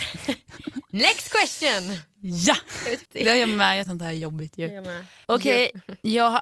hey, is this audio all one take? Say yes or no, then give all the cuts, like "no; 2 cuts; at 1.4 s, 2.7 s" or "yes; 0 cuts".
no; 3 cuts; at 3.0 s, 3.9 s, 5.2 s